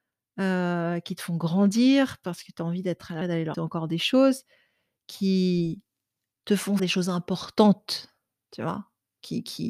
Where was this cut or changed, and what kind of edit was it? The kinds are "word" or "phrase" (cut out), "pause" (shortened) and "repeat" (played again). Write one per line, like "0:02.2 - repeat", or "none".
0:03.2 - word
0:03.5 - word
0:06.8 - word